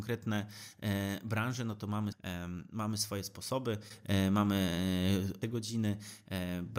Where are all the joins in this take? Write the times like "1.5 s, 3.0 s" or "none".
2.1 s, 5.4 s